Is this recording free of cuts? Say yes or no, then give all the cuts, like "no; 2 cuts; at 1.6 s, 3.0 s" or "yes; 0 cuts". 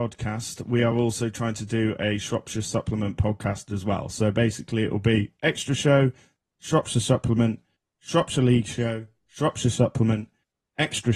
yes; 0 cuts